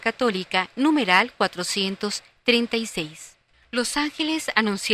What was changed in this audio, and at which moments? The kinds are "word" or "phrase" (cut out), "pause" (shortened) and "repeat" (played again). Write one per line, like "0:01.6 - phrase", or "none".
0:03.5 - pause

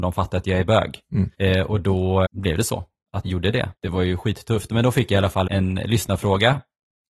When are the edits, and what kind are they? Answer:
0:01.3 - pause
0:02.2 - word
0:03.2 - word
0:03.8 - pause
0:05.5 - word

